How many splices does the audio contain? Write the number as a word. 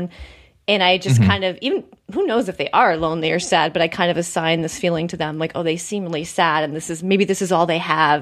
zero